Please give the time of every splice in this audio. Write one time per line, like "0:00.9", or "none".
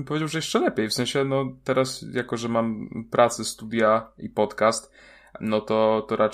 0:05.4